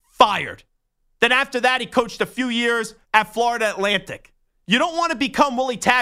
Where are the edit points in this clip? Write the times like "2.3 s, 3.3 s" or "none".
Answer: 3.0 s, 4.4 s